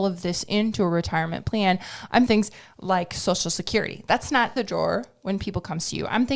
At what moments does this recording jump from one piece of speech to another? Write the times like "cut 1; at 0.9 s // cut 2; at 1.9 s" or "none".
cut 1; at 2.3 s // cut 2; at 4.6 s